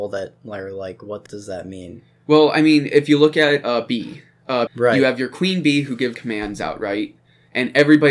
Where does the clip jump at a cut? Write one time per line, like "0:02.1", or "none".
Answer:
0:01.3
0:04.7
0:06.1